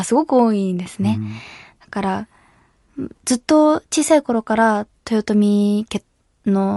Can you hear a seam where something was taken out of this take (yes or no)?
no